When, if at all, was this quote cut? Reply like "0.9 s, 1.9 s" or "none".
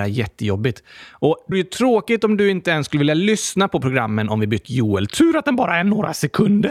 1.5 s, 4.6 s